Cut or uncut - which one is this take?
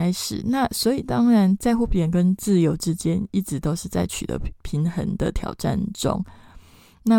cut